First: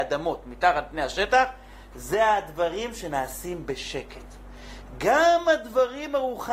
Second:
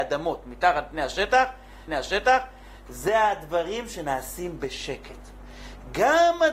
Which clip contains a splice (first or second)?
second